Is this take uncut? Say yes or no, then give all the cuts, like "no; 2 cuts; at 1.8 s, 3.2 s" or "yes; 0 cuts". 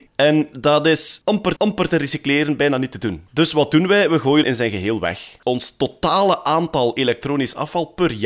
no; 2 cuts; at 1.6 s, 4.4 s